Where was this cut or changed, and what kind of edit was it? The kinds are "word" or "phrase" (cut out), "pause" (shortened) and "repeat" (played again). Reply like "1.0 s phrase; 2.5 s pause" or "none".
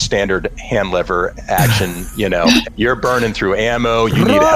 2.6 s word